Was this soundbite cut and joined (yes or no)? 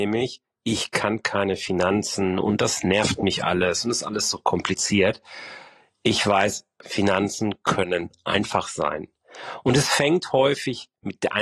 no